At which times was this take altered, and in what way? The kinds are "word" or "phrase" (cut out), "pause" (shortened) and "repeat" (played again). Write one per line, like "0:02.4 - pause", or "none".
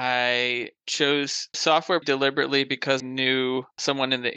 0:01.5 - word
0:02.0 - word
0:03.0 - word